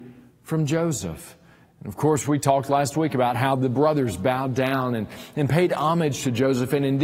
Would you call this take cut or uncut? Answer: uncut